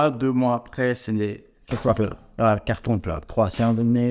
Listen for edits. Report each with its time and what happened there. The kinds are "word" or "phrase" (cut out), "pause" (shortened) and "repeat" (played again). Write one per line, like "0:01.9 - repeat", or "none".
none